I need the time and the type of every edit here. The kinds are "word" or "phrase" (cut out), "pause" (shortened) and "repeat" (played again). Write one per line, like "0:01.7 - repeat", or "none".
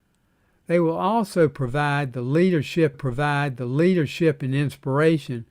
0:02.9 - repeat